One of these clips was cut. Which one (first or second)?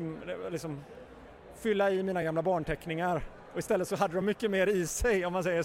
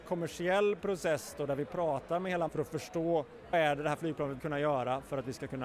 second